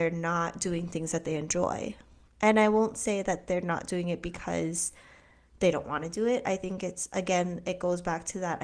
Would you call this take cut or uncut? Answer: uncut